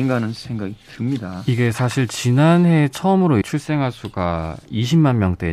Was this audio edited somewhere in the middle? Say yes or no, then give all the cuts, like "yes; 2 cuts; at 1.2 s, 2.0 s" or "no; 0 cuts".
yes; 1 cut; at 3.4 s